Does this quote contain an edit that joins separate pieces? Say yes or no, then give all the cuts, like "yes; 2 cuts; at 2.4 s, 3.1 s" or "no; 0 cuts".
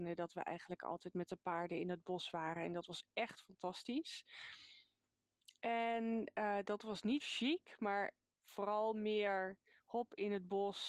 yes; 1 cut; at 7.2 s